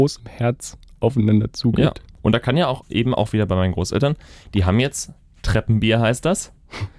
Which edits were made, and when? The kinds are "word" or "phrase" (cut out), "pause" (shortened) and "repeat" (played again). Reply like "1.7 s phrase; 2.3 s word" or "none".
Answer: 2.8 s word